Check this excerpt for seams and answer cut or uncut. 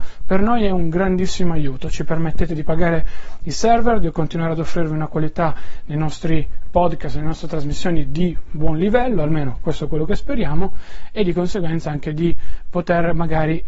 uncut